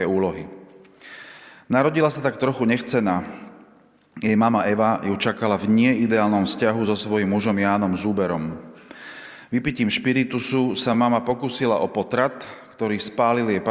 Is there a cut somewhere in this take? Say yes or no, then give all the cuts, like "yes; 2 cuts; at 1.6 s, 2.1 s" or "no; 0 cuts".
no; 0 cuts